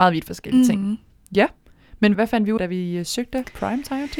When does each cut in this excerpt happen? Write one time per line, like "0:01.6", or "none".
0:02.1
0:02.6